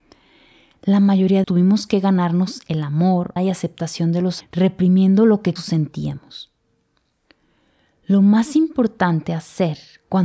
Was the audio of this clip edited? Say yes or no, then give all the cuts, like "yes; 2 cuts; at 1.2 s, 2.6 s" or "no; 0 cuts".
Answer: yes; 4 cuts; at 1.4 s, 3.4 s, 4.4 s, 5.6 s